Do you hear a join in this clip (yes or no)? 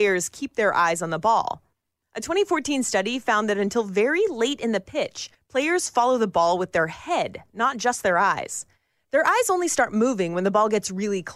no